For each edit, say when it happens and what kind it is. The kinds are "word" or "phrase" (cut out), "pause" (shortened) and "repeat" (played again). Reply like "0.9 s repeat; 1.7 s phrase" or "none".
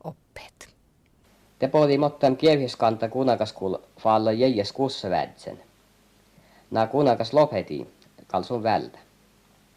none

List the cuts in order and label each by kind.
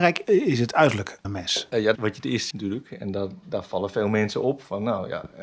1.2 s word; 1.9 s phrase; 2.5 s word

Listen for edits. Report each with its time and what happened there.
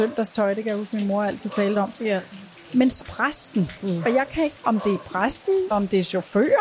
3.0 s word; 4.6 s word; 5.7 s word

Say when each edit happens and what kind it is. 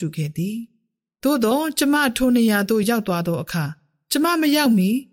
none

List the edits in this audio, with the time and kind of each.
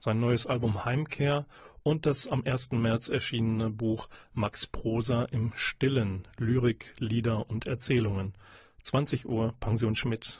none

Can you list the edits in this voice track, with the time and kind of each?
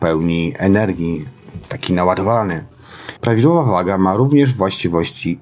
3.2 s pause

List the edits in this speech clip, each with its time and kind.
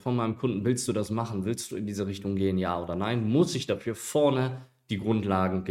none

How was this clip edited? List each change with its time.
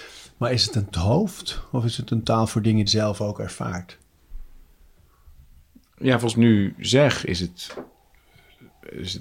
0.9 s phrase; 2.9 s phrase; 6.3 s phrase

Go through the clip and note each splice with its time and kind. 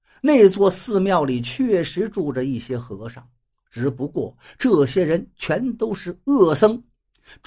none

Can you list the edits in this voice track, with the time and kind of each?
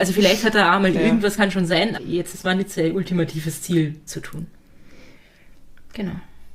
0.9 s word; 1.4 s word; 2.0 s word; 2.3 s word; 4.1 s word

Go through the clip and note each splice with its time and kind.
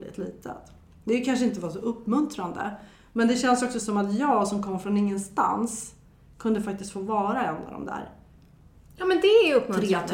none

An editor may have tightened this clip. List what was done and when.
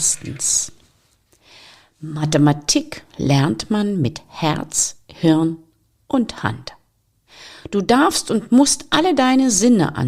none

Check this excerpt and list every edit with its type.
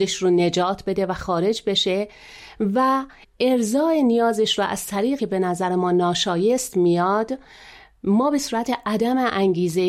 3.2 s word; 5.2 s word

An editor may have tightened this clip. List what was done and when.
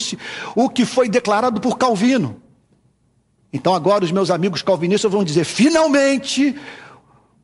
none

